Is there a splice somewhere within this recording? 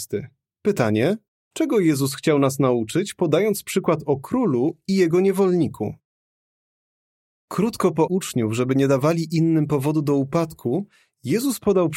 yes; 2 cuts; at 1.4 s, 8.1 s

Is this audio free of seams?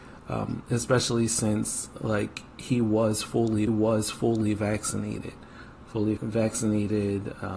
no; 2 cuts; at 3.7 s, 6.2 s

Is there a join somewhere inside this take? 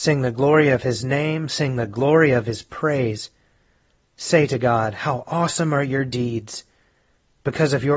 no; 0 cuts

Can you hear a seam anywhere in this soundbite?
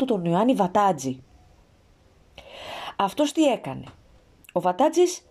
no; 0 cuts

